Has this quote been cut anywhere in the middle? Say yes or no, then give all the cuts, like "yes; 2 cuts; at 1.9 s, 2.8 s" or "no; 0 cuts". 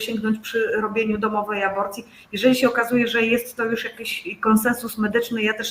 no; 0 cuts